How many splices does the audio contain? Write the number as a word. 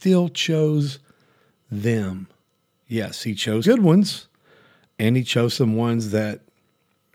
one